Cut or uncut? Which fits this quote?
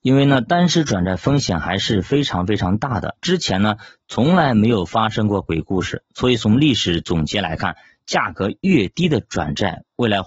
cut